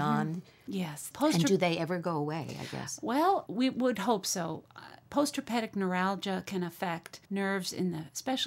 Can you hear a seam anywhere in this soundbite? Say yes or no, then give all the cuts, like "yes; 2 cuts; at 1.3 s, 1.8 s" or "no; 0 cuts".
yes; 3 cuts; at 1.1 s, 3.5 s, 7.2 s